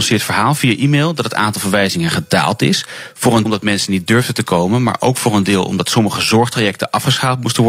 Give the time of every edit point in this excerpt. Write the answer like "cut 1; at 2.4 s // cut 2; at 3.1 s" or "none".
cut 1; at 3.5 s